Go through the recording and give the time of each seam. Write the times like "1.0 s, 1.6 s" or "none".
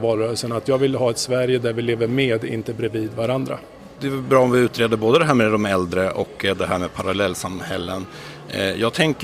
none